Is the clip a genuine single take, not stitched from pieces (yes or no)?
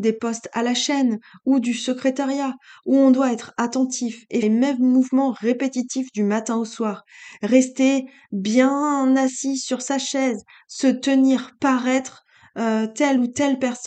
no